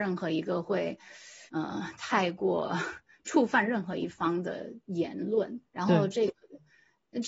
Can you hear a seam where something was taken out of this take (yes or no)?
yes